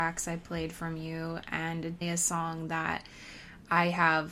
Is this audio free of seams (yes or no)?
no